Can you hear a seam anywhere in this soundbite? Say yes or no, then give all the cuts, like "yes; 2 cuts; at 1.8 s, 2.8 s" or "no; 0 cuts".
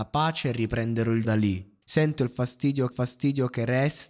yes; 3 cuts; at 1.2 s, 1.8 s, 2.9 s